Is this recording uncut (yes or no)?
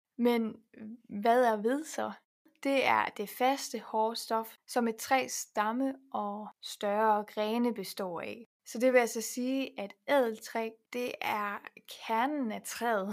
yes